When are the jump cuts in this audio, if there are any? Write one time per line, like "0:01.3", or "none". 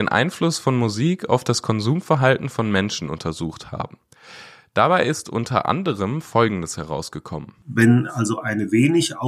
none